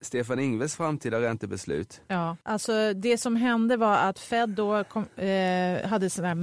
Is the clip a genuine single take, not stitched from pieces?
no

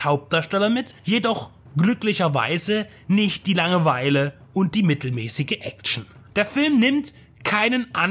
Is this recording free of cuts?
yes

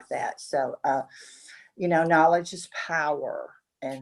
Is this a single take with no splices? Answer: yes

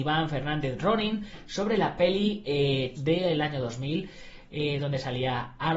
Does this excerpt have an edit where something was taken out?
yes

